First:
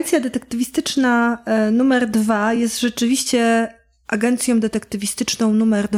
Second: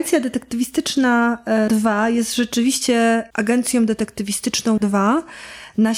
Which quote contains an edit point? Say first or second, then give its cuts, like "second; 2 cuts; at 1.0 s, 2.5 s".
second; 3 cuts; at 1.7 s, 3.3 s, 4.8 s